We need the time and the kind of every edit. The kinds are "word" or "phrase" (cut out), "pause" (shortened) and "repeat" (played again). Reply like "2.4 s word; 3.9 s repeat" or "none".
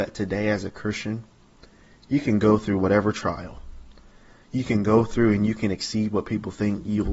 none